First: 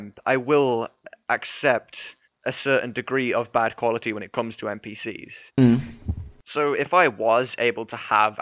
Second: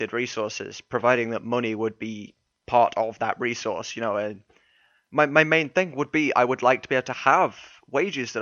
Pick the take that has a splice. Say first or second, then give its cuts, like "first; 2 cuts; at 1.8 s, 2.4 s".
first; 2 cuts; at 2.2 s, 5.5 s